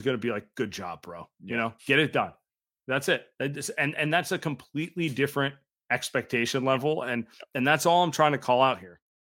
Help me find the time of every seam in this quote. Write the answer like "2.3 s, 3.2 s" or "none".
1.8 s, 3.3 s